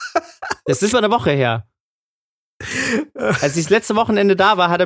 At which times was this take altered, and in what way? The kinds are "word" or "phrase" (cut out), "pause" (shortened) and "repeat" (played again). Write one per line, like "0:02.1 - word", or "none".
0:00.9 - phrase